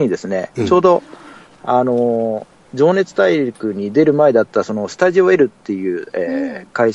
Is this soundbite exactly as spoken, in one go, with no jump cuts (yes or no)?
yes